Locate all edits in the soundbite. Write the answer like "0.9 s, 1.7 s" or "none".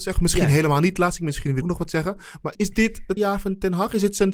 1.6 s, 2.5 s, 3.2 s